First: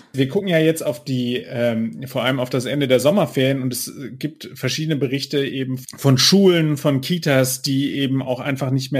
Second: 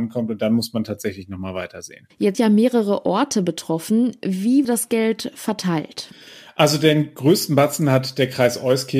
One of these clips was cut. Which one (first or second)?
second